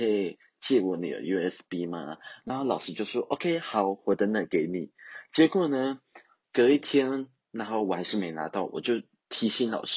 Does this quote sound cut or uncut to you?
uncut